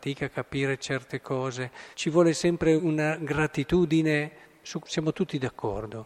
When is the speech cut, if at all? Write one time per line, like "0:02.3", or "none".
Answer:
0:01.9
0:02.8
0:04.8